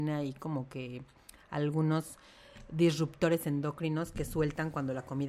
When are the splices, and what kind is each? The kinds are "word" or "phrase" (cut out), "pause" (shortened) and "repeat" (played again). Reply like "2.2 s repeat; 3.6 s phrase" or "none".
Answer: none